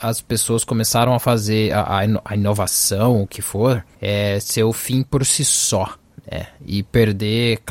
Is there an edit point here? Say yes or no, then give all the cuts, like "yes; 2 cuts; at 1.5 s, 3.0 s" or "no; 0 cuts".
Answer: yes; 1 cut; at 3.9 s